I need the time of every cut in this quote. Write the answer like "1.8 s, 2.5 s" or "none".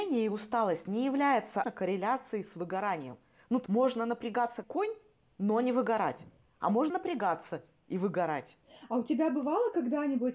1.6 s, 3.7 s, 4.6 s, 6.9 s